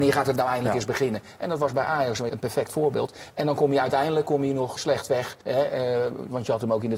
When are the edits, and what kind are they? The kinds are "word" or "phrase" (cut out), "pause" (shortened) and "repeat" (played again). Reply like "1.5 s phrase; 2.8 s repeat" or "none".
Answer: 2.3 s word; 4.8 s word; 5.4 s pause